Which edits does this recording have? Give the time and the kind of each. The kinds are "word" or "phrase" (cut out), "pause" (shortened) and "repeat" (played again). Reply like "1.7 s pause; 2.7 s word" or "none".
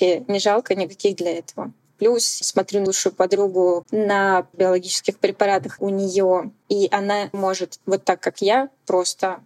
1.2 s word; 2.4 s word; 2.9 s word; 3.8 s word; 4.5 s word; 5.8 s word; 6.6 s word; 7.3 s word

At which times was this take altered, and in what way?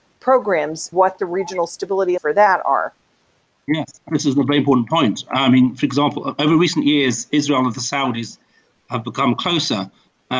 0.9 s word; 2.2 s word; 4.1 s word

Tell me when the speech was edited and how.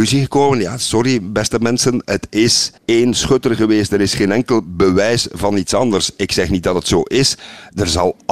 2.8 s pause

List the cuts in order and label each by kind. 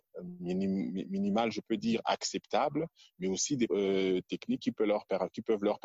3.7 s word

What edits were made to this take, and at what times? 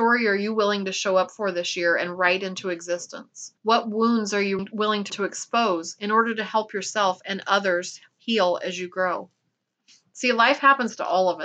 3.6 s pause; 4.6 s word; 5.1 s word

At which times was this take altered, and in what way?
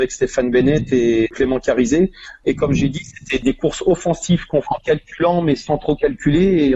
4.6 s word

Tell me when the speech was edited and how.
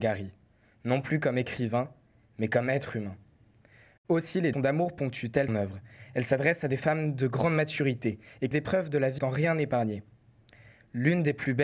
4.5 s word; 5.5 s word; 8.5 s word; 9.2 s word

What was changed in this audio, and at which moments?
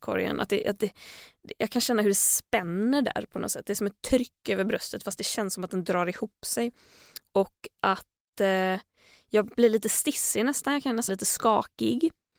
11.1 s word

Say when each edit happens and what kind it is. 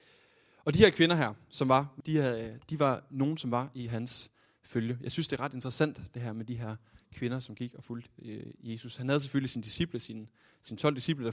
2.0 s word

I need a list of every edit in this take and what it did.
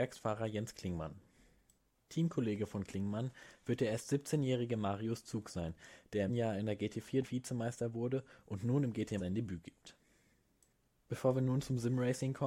6.3 s word; 7.2 s word; 9.2 s word

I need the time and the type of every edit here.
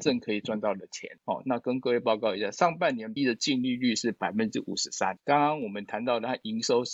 3.2 s word

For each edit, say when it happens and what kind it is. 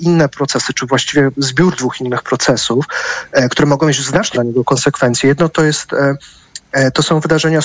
4.3 s word

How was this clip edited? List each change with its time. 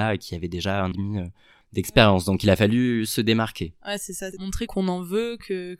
0.9 s phrase; 4.7 s word

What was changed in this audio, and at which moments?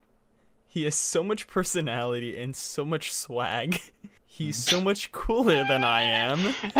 4.2 s pause

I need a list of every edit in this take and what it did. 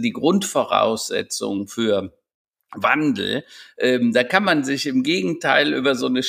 none

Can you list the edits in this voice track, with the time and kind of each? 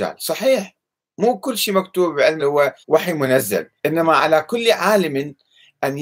2.4 s word; 2.8 s pause; 3.8 s pause

